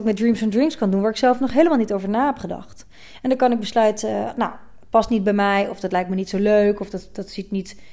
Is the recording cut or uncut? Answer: uncut